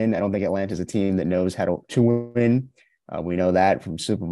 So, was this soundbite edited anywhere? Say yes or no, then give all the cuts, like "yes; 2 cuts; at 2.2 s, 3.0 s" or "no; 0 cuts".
yes; 1 cut; at 1.9 s